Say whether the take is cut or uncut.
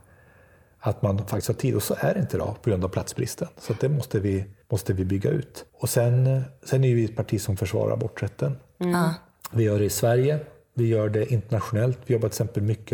cut